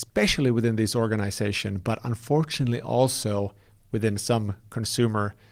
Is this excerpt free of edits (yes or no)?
yes